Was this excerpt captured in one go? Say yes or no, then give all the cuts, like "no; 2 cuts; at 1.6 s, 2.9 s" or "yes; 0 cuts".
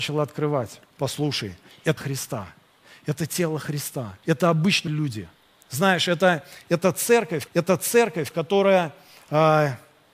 no; 6 cuts; at 0.9 s, 2.0 s, 4.2 s, 4.9 s, 5.3 s, 7.5 s